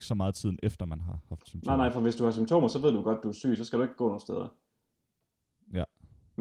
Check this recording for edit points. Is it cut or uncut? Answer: uncut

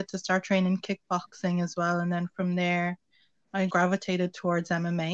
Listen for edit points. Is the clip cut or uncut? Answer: cut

